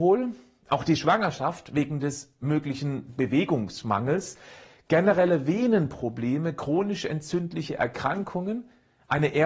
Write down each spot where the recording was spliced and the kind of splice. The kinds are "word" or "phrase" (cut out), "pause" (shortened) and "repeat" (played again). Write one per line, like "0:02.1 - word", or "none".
none

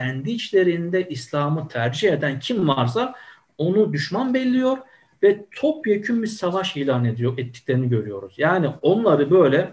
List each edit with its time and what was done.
none

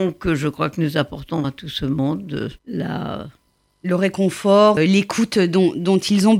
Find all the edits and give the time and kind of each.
0:01.4 - word
0:02.6 - pause
0:04.8 - word

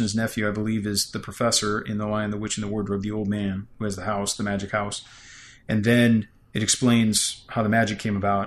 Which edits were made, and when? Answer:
none

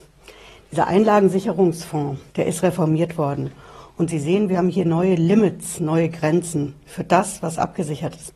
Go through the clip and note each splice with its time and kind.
0:02.3 - pause

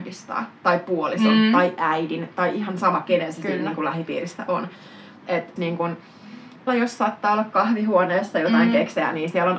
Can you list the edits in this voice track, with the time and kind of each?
0:05.6 - word
0:06.7 - word

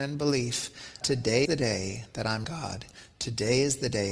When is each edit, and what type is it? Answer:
0:01.0 - word
0:01.5 - word
0:02.4 - word

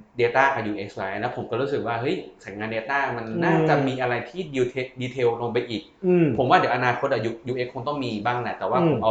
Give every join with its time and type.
none

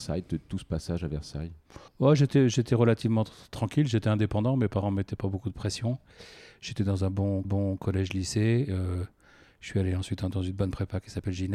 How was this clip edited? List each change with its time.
0:01.9 - pause
0:07.4 - repeat

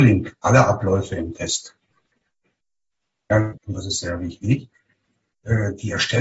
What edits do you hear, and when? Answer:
0:03.6 - phrase

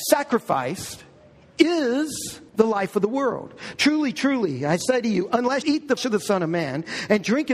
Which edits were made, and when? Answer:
0:02.5 - pause
0:05.6 - word
0:06.0 - word

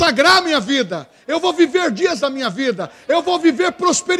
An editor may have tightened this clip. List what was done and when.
0:02.2 - word

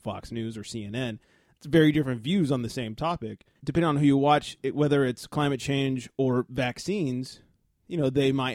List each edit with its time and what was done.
0:03.6 - pause

